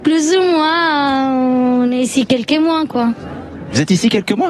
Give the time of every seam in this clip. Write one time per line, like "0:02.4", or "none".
none